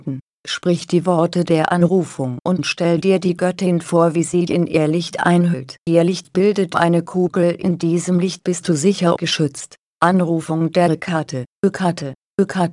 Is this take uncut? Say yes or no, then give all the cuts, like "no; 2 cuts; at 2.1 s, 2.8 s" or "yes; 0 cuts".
no; 6 cuts; at 2.4 s, 4.5 s, 5.8 s, 6.7 s, 9.2 s, 11.6 s